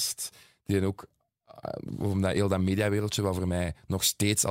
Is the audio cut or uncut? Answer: uncut